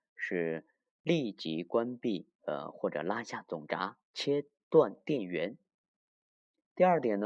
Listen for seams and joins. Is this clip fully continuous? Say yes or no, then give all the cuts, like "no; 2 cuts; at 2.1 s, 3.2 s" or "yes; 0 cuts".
no; 2 cuts; at 2.3 s, 4.0 s